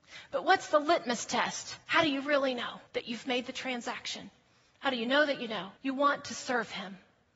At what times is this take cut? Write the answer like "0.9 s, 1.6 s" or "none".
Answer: 1.8 s, 2.9 s, 5.8 s